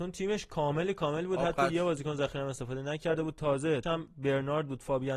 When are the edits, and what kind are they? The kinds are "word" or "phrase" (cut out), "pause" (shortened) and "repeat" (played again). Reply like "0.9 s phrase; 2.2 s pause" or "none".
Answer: 3.8 s word